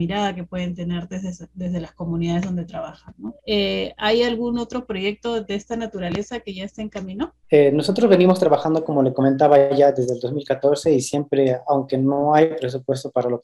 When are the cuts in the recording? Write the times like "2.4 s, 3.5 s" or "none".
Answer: 3.4 s, 7.4 s

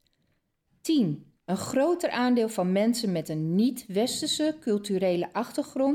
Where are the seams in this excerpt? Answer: 1.4 s

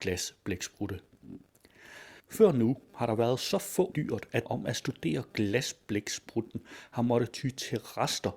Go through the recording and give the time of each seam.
2.2 s, 3.9 s, 4.5 s

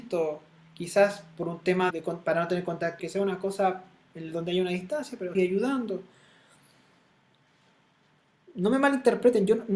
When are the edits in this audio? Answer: 1.9 s, 3.0 s, 5.3 s

